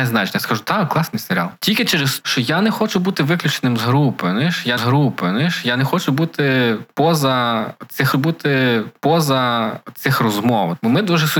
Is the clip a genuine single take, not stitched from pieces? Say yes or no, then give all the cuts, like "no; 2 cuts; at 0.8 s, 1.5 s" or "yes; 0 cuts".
no; 3 cuts; at 2.2 s, 4.8 s, 8.1 s